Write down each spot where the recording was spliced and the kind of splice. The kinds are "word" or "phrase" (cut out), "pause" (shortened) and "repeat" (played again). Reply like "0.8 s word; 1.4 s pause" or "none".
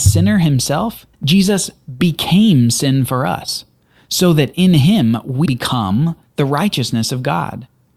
1.1 s pause; 5.5 s word